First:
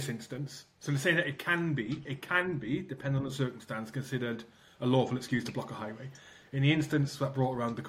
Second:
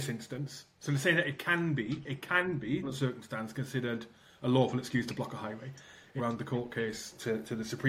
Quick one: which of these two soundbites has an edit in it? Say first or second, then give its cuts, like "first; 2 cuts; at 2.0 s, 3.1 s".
second; 2 cuts; at 2.8 s, 6.2 s